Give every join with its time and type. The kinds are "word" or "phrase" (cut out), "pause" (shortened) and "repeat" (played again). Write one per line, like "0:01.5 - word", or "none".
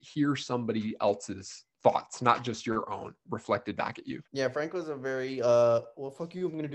0:01.7 - pause
0:04.2 - pause